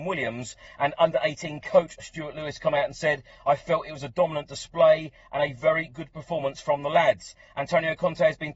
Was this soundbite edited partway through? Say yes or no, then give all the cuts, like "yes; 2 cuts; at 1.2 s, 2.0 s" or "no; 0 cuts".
no; 0 cuts